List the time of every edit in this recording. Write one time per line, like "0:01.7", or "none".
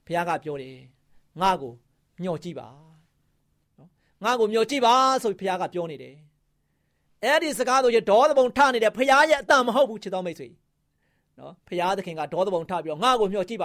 0:11.6